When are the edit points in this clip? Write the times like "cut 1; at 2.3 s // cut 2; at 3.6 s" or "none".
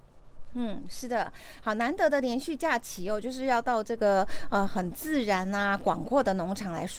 none